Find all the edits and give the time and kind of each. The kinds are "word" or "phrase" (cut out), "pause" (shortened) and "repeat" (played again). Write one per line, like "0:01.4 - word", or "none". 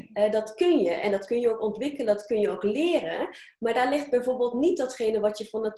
none